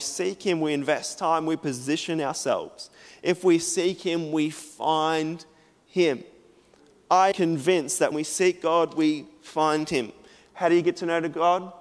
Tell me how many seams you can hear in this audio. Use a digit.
2